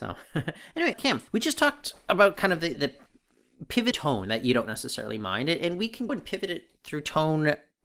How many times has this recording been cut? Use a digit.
5